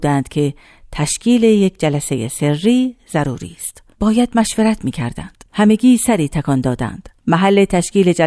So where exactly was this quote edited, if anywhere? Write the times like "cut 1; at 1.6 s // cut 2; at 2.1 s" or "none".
cut 1; at 3.9 s // cut 2; at 5.5 s // cut 3; at 7.2 s